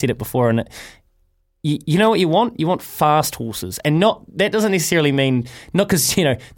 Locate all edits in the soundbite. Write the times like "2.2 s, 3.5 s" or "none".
none